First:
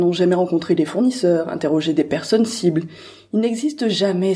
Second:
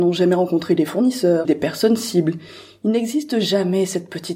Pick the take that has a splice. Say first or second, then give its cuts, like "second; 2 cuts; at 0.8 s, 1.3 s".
second; 1 cut; at 1.4 s